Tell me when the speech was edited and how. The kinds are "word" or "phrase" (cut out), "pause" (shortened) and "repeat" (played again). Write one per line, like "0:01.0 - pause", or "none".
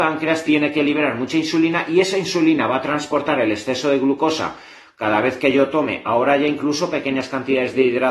none